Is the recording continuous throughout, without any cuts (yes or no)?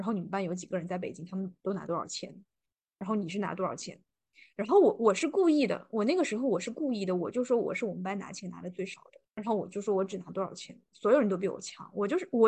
no